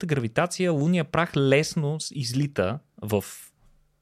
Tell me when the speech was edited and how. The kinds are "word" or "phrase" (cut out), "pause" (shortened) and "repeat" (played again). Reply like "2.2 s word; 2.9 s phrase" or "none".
none